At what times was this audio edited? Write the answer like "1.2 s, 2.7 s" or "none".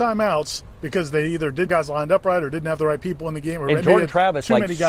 1.7 s